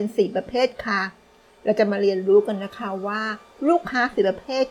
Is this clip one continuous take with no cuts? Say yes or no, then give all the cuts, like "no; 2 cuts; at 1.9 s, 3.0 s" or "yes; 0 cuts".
yes; 0 cuts